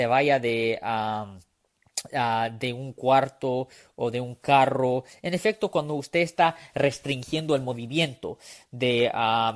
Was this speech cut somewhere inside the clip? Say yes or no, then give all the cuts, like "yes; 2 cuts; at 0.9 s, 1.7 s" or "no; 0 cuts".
no; 0 cuts